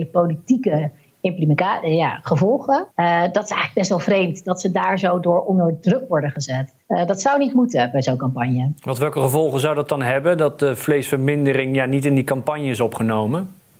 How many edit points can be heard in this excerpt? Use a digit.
2